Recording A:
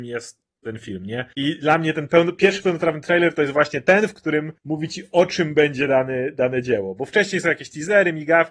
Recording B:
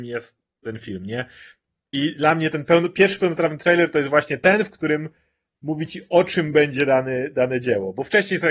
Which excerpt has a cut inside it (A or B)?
A